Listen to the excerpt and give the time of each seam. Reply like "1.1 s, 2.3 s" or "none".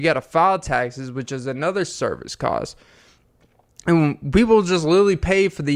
none

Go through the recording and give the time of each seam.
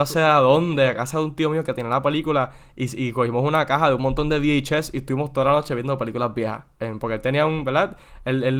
none

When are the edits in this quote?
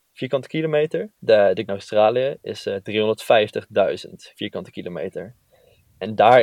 1.2 s, 1.7 s, 4.3 s

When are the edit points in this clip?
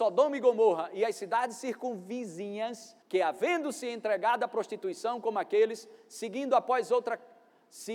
3.0 s

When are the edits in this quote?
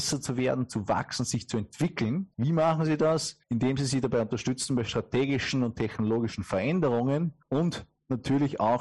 2.3 s, 3.4 s, 7.4 s

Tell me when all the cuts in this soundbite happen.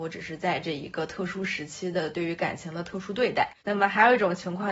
3.6 s

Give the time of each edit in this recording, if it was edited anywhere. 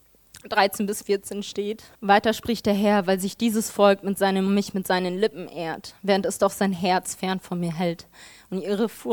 1.9 s, 4.5 s

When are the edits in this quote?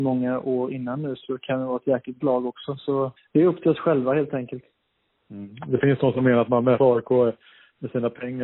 2.2 s, 3.2 s, 6.8 s

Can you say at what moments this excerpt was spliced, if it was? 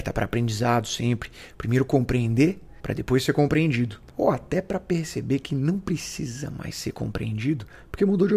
2.8 s, 4.1 s

